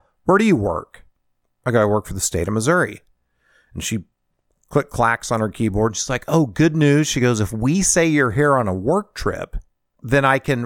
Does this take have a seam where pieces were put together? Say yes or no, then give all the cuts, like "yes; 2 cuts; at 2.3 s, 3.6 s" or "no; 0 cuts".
no; 0 cuts